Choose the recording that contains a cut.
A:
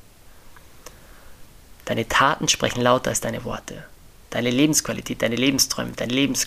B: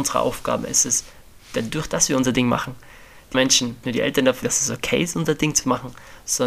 B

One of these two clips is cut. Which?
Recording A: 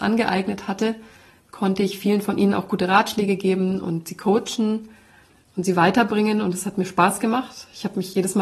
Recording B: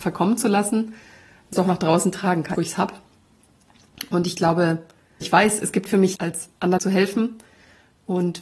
B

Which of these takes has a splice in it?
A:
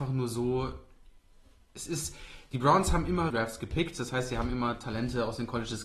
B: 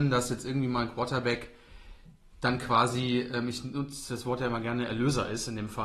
A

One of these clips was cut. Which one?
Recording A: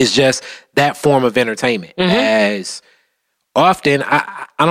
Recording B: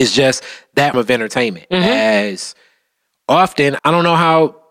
B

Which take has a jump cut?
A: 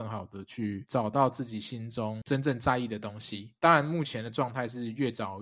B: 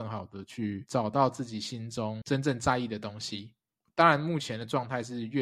A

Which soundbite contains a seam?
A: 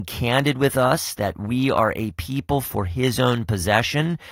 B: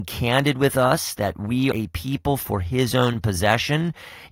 B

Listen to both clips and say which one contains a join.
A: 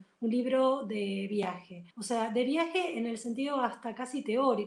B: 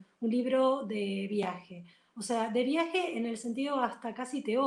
A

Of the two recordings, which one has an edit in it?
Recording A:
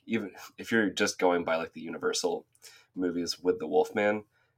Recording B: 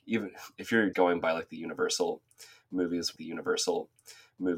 B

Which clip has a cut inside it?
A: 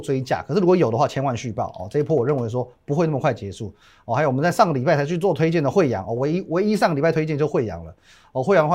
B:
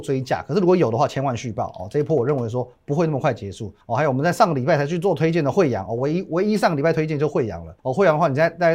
B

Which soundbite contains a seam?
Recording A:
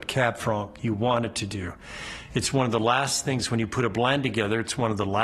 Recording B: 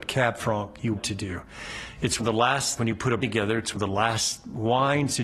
B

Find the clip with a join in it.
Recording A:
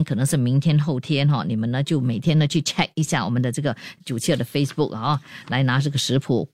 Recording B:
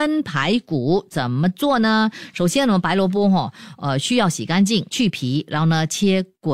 B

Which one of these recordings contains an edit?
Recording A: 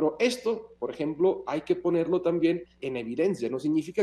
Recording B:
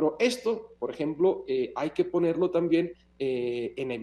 A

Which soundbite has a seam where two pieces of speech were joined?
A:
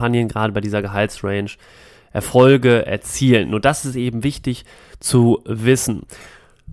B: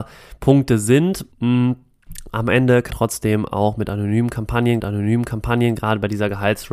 B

